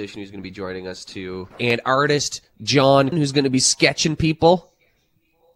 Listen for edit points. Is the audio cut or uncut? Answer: cut